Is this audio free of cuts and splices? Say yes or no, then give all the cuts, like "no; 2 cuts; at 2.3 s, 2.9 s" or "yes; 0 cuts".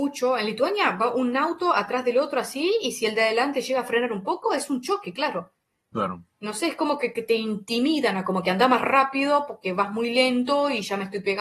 yes; 0 cuts